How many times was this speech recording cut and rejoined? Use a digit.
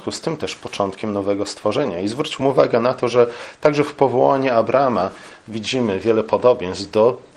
0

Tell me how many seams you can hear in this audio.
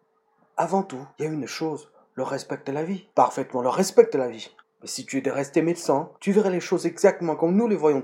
4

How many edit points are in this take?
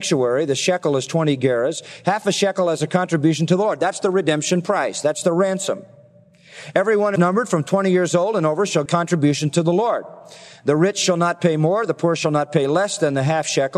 2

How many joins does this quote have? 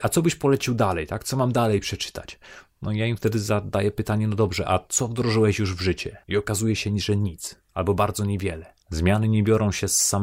3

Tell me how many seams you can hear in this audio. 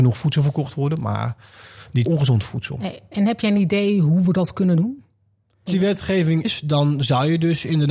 3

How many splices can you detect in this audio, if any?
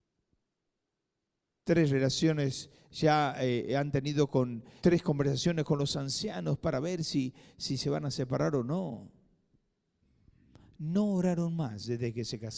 1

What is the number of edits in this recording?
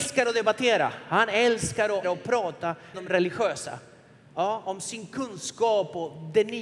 2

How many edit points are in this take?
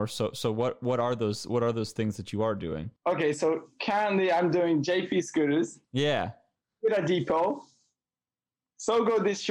2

